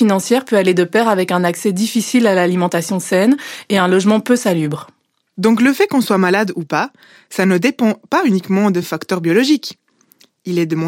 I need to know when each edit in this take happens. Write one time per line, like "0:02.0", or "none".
none